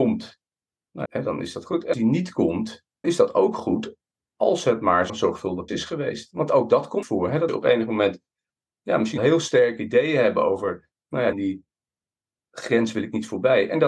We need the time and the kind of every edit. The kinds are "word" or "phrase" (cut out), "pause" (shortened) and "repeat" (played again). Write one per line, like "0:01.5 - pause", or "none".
0:01.0 - word
0:01.9 - word
0:03.0 - word
0:05.1 - word
0:05.7 - word
0:07.0 - word
0:07.5 - word
0:09.2 - word
0:11.3 - word

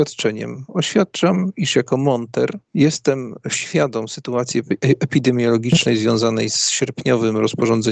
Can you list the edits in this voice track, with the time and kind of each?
0:02.6 - pause

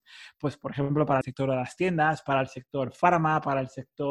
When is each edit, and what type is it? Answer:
0:01.2 - phrase

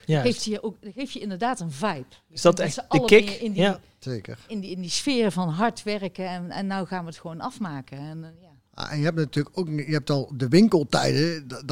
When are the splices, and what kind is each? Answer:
0:08.7 - pause

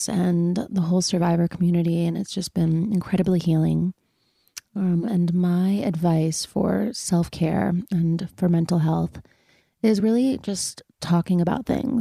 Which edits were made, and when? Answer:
none

